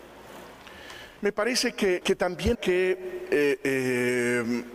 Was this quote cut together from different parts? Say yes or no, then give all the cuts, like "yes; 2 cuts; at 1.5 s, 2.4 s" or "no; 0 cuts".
yes; 3 cuts; at 1.2 s, 2.0 s, 2.5 s